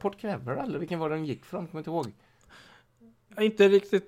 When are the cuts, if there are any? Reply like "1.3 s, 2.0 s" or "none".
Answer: none